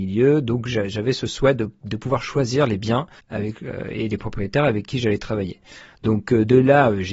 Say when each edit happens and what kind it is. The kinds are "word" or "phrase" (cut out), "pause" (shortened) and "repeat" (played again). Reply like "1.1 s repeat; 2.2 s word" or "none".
3.2 s pause